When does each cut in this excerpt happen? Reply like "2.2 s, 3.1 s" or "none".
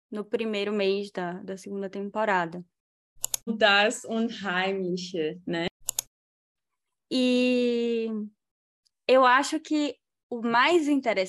none

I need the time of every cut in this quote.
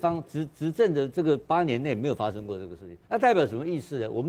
3.0 s

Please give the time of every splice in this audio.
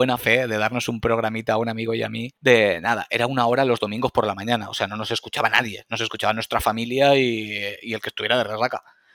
2.4 s

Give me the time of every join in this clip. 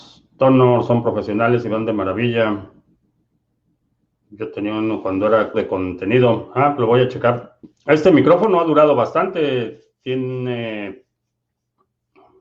5.5 s

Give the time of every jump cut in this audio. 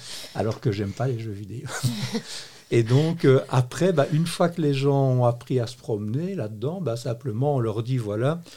none

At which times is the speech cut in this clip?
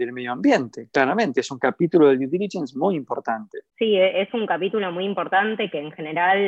3.7 s

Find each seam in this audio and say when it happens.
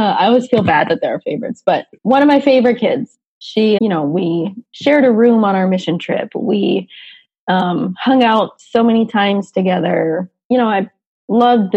2.0 s, 3.8 s

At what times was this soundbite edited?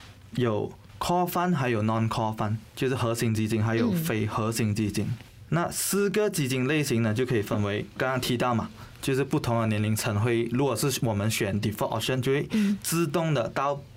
none

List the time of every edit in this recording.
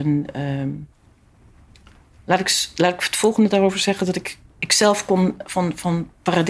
none

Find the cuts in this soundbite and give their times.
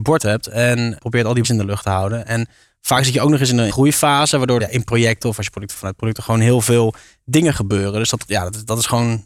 1.0 s, 1.4 s, 3.7 s, 4.6 s, 5.7 s

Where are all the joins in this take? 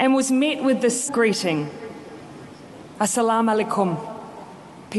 1.1 s

